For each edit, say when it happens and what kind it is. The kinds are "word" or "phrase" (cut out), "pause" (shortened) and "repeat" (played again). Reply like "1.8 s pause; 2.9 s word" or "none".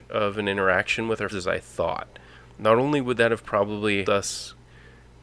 1.3 s word; 2.5 s pause; 4.0 s word